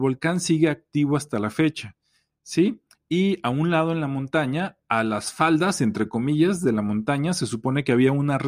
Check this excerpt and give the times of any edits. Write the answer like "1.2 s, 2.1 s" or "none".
none